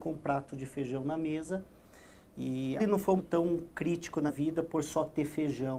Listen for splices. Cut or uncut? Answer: cut